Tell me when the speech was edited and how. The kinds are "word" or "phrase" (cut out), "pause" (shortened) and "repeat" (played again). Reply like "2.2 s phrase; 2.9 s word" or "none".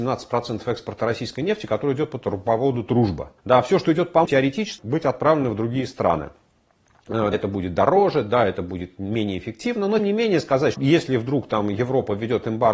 3.4 s pause; 4.3 s word; 4.8 s word; 7.3 s word; 10.0 s word; 10.7 s phrase

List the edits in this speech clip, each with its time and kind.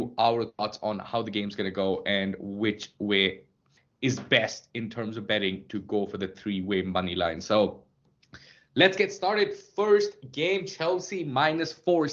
none

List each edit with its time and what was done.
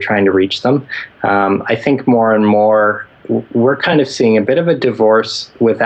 none

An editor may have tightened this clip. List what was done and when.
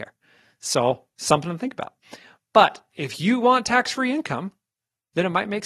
none

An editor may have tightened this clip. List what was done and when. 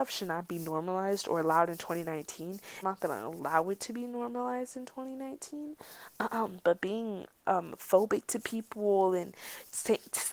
2.8 s phrase

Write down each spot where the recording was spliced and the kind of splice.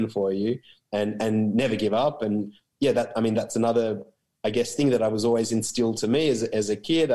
none

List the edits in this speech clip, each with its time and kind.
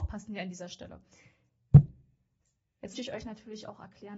2.9 s word

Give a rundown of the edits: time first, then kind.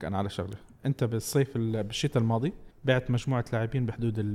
2.7 s pause

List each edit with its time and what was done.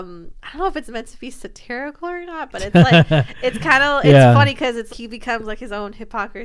4.9 s word

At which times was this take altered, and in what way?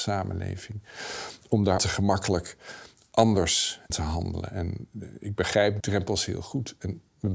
1.8 s word; 3.9 s word; 5.8 s word

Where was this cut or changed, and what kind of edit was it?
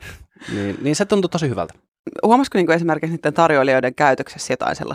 none

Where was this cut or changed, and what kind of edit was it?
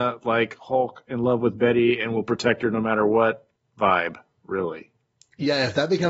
none

